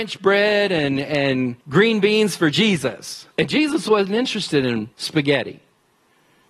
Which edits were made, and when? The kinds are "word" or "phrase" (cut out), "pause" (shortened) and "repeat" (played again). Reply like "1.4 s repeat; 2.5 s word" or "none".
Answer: 1.6 s pause; 3.3 s pause; 4.9 s pause